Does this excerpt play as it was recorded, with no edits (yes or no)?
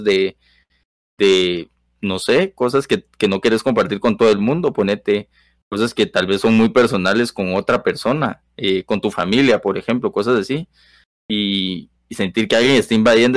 yes